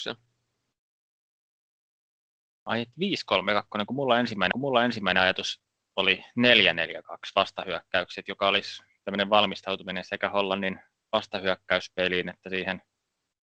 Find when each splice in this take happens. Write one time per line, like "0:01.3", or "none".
0:04.5